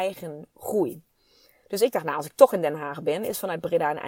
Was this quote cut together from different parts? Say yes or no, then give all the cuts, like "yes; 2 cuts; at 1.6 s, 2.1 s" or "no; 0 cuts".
no; 0 cuts